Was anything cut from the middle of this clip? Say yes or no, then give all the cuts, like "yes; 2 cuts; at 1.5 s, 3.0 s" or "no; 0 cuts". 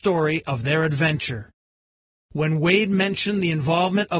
no; 0 cuts